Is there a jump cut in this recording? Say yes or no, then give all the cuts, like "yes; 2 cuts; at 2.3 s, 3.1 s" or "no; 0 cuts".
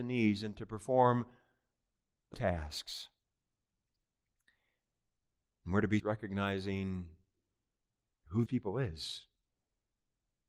yes; 3 cuts; at 2.3 s, 6.0 s, 8.5 s